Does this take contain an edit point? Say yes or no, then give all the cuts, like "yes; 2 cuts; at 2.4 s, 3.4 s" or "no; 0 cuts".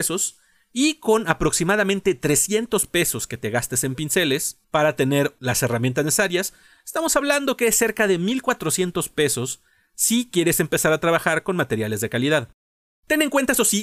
yes; 1 cut; at 4.6 s